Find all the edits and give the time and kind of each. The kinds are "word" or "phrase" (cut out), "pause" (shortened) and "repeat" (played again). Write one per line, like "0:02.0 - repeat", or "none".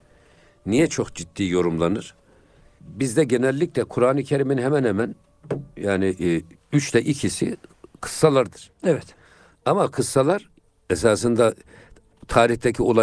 none